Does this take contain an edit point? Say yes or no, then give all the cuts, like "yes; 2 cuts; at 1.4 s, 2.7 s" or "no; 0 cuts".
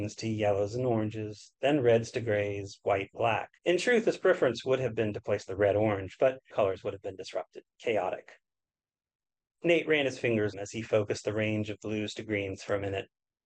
yes; 6 cuts; at 3.1 s, 3.6 s, 5.6 s, 6.5 s, 7.7 s, 10.5 s